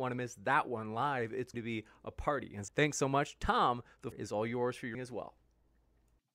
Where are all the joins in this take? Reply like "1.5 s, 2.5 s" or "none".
1.5 s, 2.7 s, 4.1 s, 4.9 s

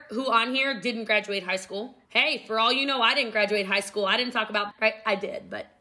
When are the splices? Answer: 2.0 s, 4.7 s

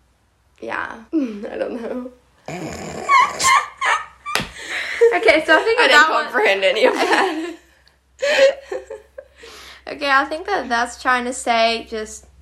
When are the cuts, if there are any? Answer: 1.1 s

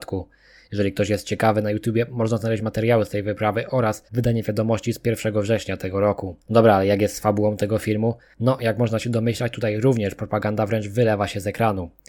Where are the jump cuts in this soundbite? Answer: 4.1 s, 6.4 s

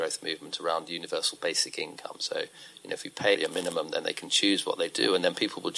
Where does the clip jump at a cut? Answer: 3.3 s

